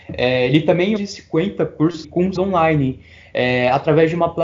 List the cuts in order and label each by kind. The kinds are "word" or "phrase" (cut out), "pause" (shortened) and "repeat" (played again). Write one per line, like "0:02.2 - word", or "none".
0:01.0 - phrase
0:02.0 - phrase
0:02.4 - word